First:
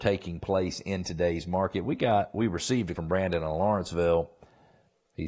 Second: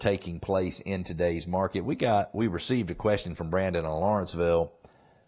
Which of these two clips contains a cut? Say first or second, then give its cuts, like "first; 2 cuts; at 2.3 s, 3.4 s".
first; 1 cut; at 3.0 s